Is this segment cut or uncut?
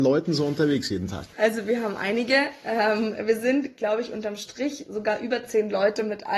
uncut